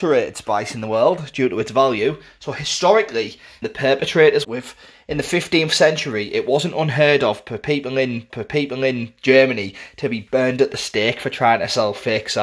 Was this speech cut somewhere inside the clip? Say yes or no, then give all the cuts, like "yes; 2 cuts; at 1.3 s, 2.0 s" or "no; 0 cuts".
yes; 3 cuts; at 3.6 s, 4.4 s, 8.3 s